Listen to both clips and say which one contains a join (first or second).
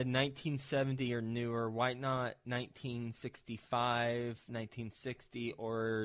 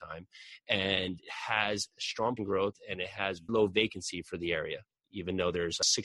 second